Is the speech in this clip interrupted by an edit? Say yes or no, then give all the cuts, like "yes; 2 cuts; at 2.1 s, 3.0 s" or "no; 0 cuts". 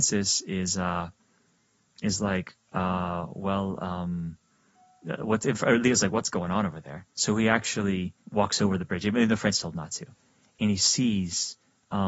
yes; 2 cuts; at 7.1 s, 8.2 s